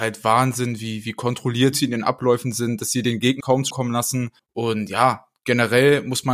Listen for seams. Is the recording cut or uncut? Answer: cut